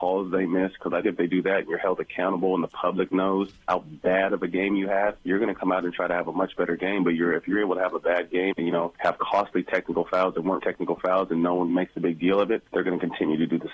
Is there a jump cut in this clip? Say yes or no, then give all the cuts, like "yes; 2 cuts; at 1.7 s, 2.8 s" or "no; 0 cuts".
yes; 4 cuts; at 1.0 s, 8.5 s, 10.6 s, 11.7 s